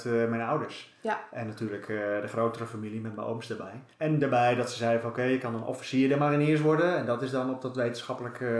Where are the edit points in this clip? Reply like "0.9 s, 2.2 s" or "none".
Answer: 3.9 s